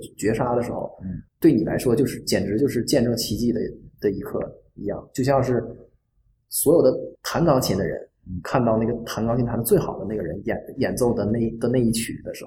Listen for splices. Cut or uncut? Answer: cut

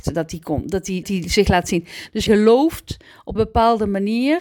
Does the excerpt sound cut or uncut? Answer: cut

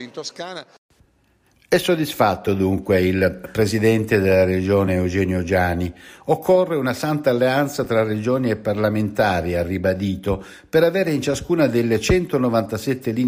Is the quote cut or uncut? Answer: uncut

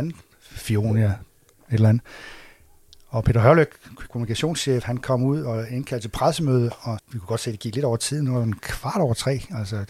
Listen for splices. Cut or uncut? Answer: cut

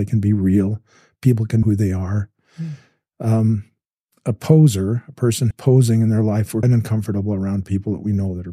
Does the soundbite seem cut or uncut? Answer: cut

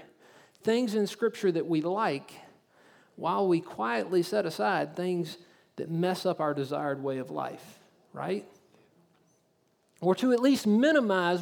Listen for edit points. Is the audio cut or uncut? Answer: uncut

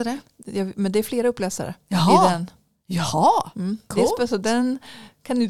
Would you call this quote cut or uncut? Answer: uncut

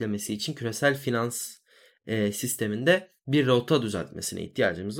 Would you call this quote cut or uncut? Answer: uncut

